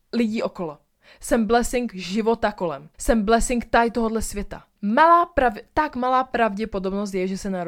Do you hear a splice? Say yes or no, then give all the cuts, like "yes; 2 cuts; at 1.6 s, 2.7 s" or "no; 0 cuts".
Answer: yes; 2 cuts; at 2.9 s, 4.7 s